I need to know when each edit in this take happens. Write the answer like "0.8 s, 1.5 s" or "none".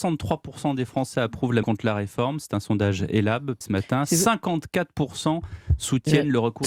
1.6 s, 3.6 s